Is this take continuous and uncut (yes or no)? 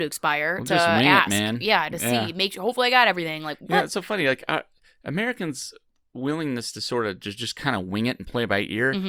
yes